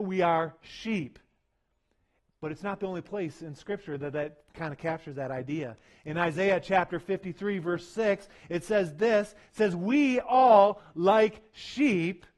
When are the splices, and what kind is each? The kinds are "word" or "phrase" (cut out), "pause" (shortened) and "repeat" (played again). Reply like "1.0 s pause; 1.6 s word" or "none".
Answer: none